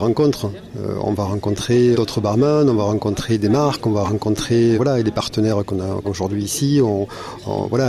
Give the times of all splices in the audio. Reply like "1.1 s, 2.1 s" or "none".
1.9 s, 4.8 s, 6.0 s

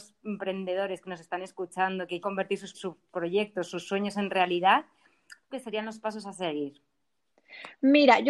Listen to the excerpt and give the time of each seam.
2.2 s, 2.7 s, 5.5 s

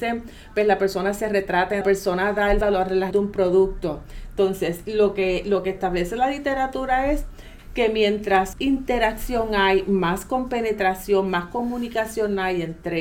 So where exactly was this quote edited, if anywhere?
1.8 s, 2.6 s, 3.1 s, 8.5 s

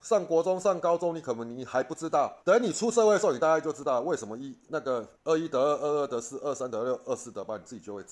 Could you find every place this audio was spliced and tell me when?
2.4 s, 5.1 s

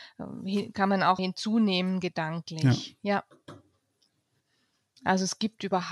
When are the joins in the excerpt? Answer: 1.2 s

